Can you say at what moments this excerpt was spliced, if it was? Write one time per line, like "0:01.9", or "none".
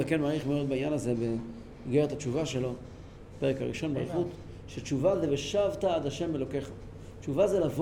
none